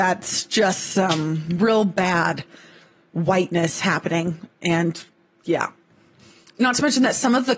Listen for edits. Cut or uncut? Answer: uncut